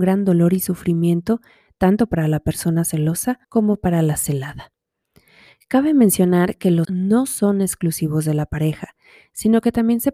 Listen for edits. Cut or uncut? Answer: cut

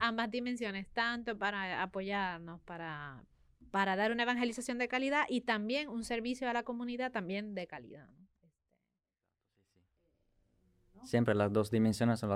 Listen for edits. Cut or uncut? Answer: uncut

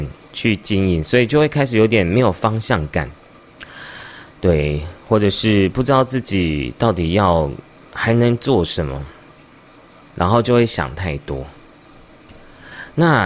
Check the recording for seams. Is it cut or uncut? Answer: uncut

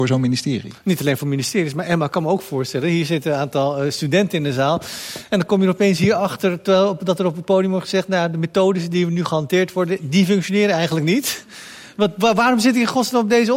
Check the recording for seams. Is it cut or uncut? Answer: uncut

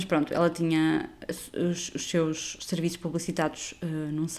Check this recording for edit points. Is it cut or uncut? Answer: uncut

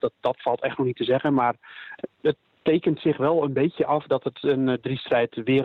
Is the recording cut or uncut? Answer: uncut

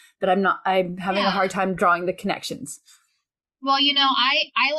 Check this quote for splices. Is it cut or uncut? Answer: uncut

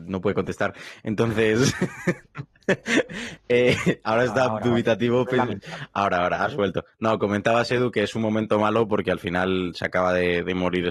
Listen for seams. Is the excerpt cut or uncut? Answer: uncut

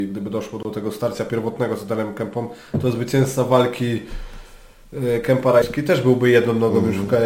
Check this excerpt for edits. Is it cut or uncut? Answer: uncut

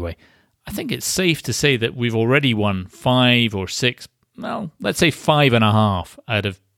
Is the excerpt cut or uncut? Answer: uncut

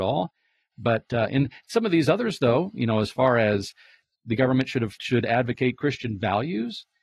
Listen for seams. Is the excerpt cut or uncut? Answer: uncut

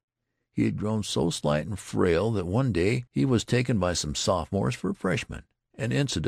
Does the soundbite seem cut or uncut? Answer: cut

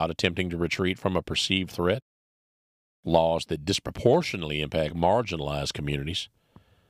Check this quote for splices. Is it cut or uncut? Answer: uncut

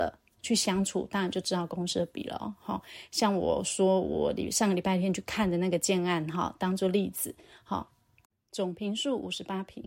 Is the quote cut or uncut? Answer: uncut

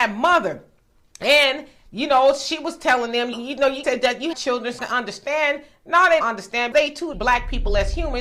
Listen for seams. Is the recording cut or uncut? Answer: cut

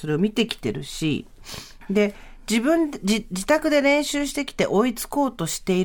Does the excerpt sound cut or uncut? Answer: uncut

